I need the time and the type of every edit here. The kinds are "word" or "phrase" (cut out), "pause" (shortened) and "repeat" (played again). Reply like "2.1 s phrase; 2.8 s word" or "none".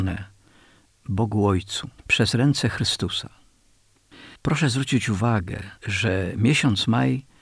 2.0 s pause; 4.4 s pause; 5.8 s pause